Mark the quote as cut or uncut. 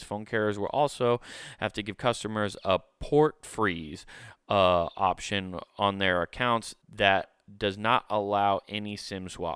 cut